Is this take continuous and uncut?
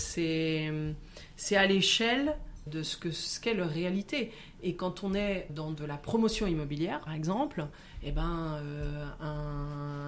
no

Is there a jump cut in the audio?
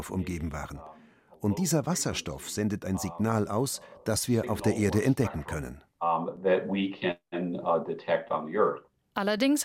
no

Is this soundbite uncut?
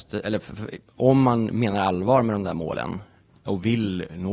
yes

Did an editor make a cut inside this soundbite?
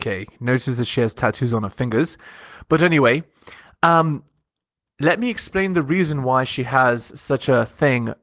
no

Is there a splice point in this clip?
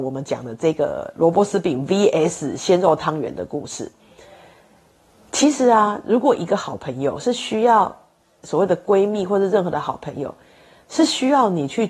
no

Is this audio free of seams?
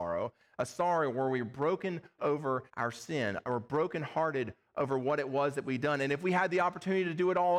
no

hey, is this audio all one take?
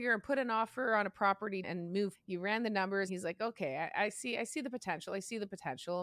no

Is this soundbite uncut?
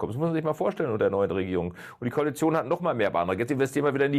yes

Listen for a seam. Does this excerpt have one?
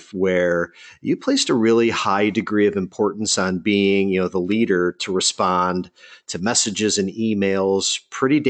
no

